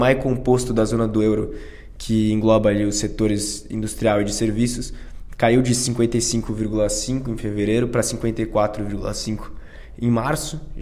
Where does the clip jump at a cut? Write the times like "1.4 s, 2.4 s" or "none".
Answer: none